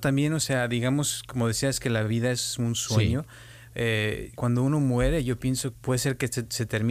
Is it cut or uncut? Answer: cut